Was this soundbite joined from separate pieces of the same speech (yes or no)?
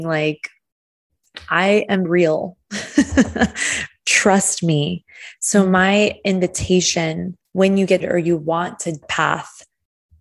yes